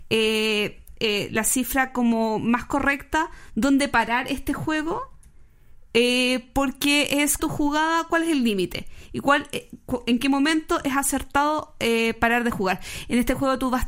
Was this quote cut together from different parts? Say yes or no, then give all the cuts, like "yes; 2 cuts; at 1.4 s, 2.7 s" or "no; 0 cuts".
yes; 1 cut; at 7.4 s